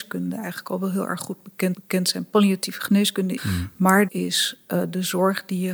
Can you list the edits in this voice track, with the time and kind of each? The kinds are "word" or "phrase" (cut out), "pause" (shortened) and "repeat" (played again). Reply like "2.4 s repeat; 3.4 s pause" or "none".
1.7 s repeat; 3.4 s phrase; 4.1 s word

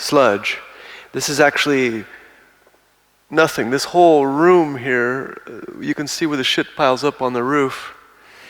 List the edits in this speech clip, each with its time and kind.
none

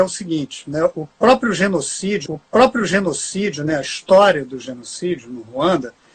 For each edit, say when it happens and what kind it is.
2.3 s repeat

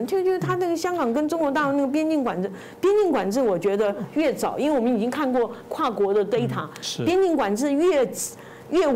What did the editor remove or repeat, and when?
none

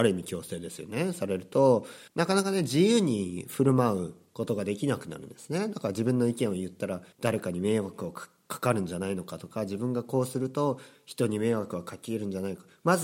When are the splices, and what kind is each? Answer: 2.1 s pause; 7.1 s pause

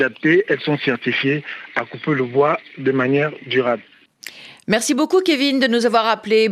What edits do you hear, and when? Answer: none

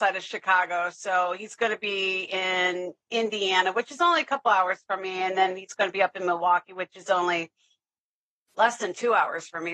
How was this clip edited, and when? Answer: none

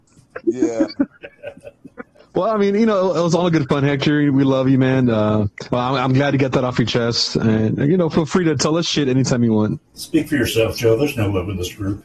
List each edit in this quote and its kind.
9.9 s pause

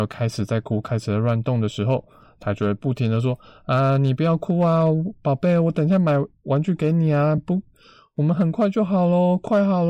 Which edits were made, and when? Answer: none

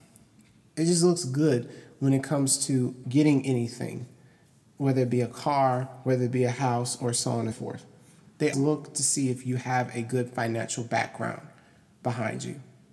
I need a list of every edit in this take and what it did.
3.0 s word; 7.5 s word; 8.5 s word

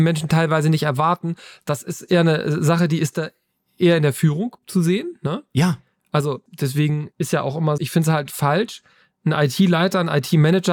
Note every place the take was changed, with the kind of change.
7.8 s word

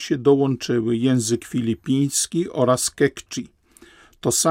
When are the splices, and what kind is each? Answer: none

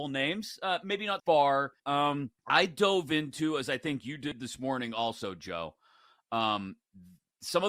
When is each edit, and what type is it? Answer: 1.2 s word; 1.8 s phrase; 2.4 s pause

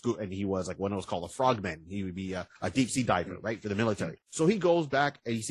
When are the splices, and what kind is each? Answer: 2.6 s pause; 4.2 s pause

